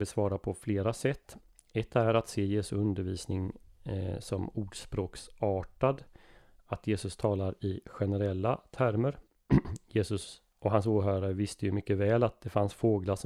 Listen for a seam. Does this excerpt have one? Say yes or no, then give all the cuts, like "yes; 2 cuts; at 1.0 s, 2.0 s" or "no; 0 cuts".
no; 0 cuts